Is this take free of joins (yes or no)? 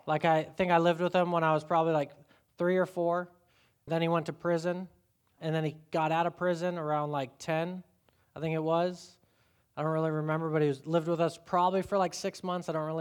yes